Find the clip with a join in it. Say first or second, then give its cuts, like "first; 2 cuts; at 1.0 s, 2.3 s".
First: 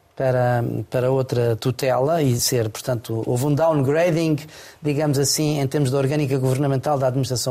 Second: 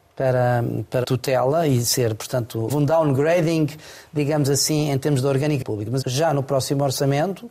second; 4 cuts; at 1.0 s, 2.7 s, 5.6 s, 6.0 s